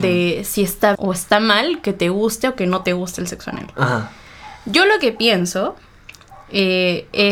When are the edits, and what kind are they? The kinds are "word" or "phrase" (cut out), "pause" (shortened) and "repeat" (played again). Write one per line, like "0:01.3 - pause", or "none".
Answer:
0:00.9 - word